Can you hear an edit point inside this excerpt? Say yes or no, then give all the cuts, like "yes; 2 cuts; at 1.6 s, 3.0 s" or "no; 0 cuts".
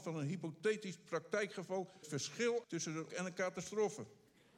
yes; 3 cuts; at 2.0 s, 2.6 s, 3.1 s